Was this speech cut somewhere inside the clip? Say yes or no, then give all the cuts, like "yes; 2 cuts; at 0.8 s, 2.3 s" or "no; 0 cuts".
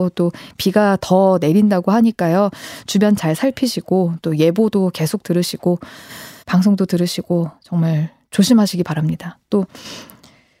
yes; 2 cuts; at 6.4 s, 7.6 s